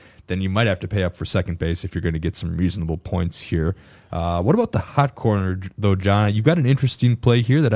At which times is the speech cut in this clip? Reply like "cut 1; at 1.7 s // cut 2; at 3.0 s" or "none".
none